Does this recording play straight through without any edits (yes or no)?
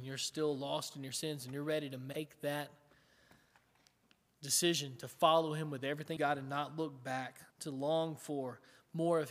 no